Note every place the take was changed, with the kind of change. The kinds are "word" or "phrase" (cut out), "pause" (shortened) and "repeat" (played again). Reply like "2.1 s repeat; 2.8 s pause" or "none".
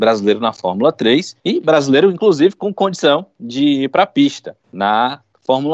1.4 s pause; 4.6 s pause